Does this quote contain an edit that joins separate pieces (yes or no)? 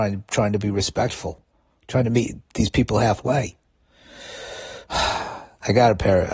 no